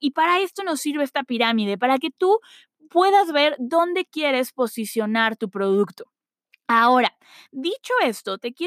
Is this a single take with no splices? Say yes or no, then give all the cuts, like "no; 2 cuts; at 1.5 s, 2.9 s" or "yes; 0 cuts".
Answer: yes; 0 cuts